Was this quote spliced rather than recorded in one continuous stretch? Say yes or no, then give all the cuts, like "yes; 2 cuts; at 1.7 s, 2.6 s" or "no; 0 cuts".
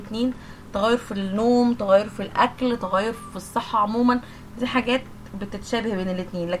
no; 0 cuts